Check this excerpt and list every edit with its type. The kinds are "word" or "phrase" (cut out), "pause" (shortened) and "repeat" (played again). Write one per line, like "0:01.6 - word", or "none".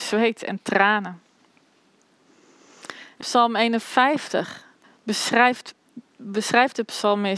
0:03.2 - word
0:04.8 - pause